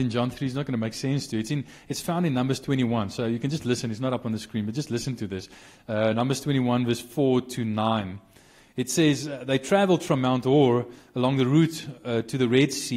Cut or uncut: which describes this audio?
uncut